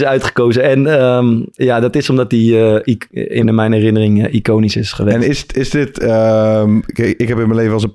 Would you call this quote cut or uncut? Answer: cut